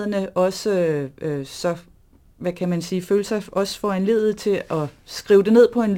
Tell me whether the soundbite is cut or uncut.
uncut